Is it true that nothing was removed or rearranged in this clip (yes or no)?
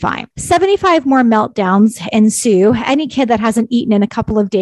yes